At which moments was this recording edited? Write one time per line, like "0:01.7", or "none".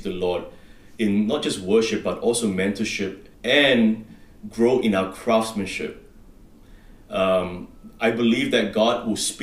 0:03.3